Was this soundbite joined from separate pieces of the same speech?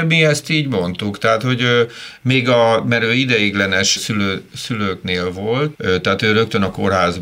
yes; 2 cuts; at 4.0 s, 5.8 s

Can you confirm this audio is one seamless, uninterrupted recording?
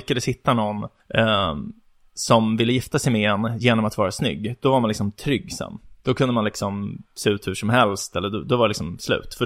no; 2 cuts; at 1.0 s, 6.0 s

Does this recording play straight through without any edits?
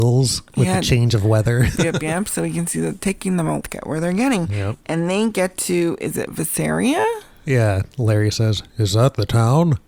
no; 4 cuts; at 1.7 s, 3.0 s, 3.6 s, 8.7 s

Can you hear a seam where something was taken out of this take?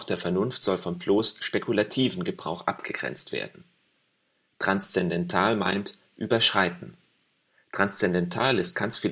no; 0 cuts

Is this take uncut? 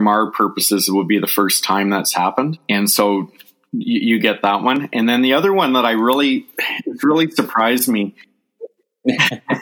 yes; 0 cuts

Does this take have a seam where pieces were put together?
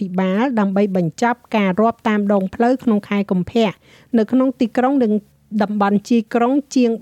no; 0 cuts

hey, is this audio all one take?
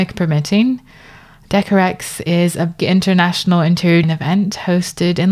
no; 2 cuts; at 2.8 s, 4.0 s

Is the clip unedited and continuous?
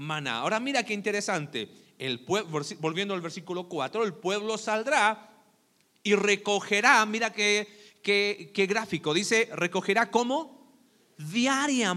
yes; 0 cuts

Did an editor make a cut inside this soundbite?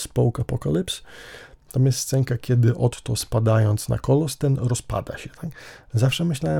no; 0 cuts

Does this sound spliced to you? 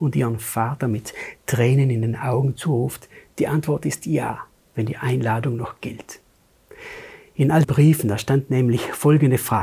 yes; 2 cuts; at 4.6 s, 7.6 s

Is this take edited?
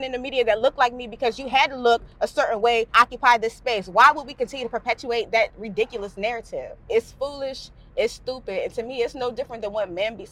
yes; 2 cuts; at 2.9 s, 6.8 s

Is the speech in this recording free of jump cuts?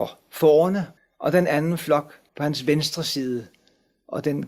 no; 2 cuts; at 1.0 s, 2.3 s

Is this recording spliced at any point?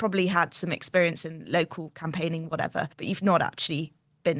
yes; 1 cut; at 2.9 s

